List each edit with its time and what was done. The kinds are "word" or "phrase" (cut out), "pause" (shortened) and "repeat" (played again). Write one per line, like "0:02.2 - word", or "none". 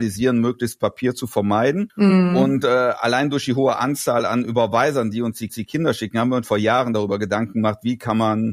0:05.5 - repeat
0:06.4 - word